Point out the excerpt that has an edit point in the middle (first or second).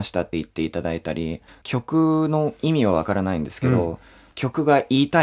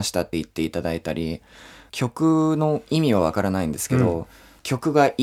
first